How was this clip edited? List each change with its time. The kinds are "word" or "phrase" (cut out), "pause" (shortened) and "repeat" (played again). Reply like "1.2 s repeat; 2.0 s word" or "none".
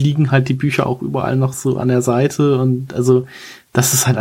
none